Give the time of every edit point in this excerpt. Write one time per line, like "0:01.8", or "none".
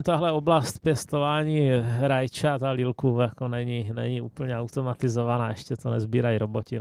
none